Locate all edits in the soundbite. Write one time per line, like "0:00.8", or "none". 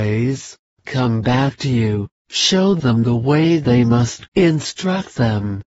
0:04.3